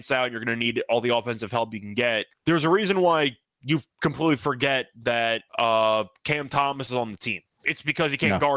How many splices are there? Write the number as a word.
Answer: three